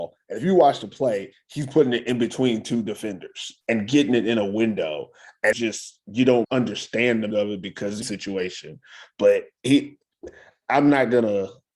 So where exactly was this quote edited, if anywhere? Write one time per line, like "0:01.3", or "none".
0:03.6
0:05.5
0:06.4
0:07.3
0:08.0